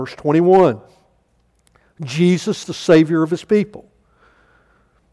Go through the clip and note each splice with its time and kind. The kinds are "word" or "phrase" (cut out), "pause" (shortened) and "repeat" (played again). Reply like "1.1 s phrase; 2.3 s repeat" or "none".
2.6 s word